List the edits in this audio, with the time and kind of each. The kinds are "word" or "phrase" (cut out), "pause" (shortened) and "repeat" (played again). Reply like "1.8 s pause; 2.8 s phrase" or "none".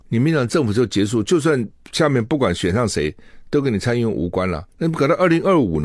none

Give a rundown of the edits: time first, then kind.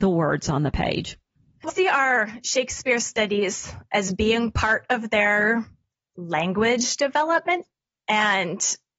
1.7 s word

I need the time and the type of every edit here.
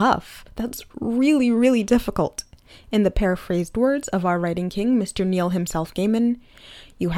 none

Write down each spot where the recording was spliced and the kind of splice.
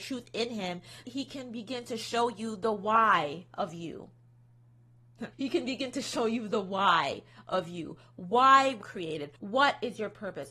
1.0 s word; 5.3 s pause; 8.8 s word; 9.4 s pause

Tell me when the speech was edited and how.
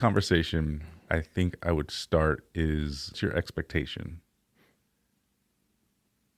1.1 s word; 3.1 s word

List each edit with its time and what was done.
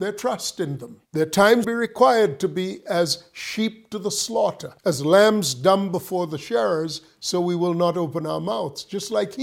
1.0 s pause; 1.6 s phrase; 4.8 s pause

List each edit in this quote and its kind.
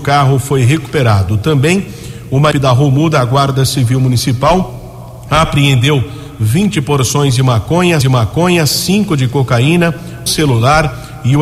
2.5 s word; 8.0 s repeat; 10.3 s word

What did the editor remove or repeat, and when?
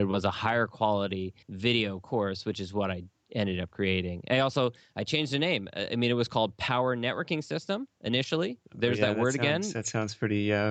1.4 s pause

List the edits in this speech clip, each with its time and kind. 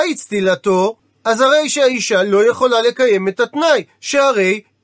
1.0 s pause

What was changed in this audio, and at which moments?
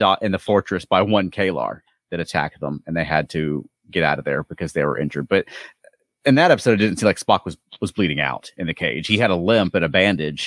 none

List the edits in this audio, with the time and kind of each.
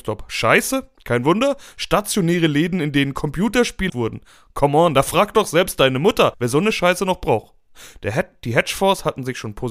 3.9 s phrase

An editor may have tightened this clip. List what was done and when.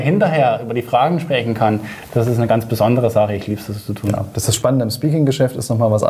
none

